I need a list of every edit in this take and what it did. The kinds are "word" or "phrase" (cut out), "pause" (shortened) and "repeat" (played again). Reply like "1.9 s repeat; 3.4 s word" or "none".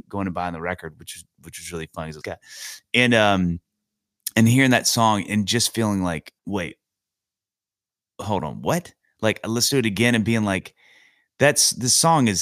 2.2 s phrase; 6.4 s pause